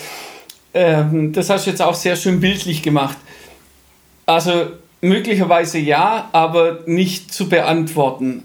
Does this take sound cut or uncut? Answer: uncut